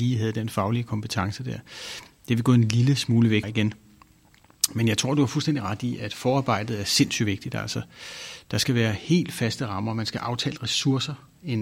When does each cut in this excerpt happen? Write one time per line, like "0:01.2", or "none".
0:03.4

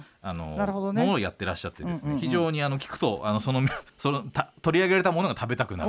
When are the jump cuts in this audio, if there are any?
0:03.9

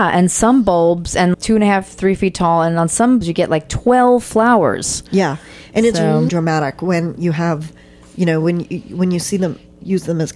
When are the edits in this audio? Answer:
0:01.3
0:03.2
0:06.3

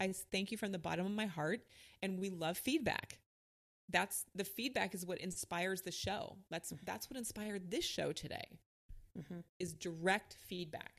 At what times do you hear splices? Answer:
none

